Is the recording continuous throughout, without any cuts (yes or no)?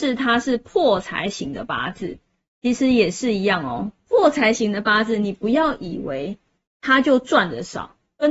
yes